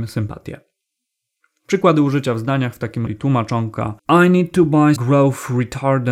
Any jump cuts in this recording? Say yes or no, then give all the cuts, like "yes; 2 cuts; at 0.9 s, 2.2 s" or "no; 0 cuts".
yes; 3 cuts; at 3.1 s, 4.0 s, 5.0 s